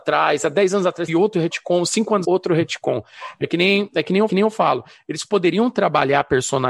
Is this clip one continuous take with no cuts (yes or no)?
no